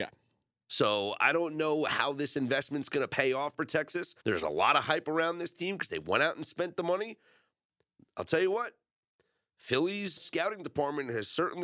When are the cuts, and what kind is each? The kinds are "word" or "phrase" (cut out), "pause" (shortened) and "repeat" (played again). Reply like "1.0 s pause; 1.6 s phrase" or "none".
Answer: 4.2 s pause; 10.2 s word

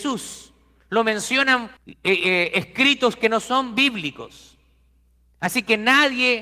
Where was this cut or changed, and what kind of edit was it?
1.8 s pause

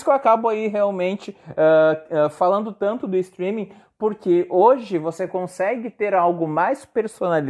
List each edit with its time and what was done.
none

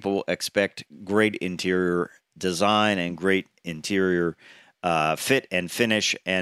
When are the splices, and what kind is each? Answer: none

